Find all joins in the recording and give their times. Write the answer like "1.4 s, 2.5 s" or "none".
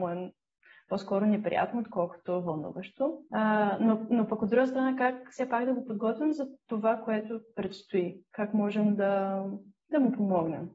3.3 s

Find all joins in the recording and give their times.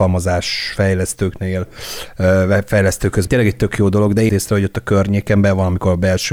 3.3 s, 4.3 s

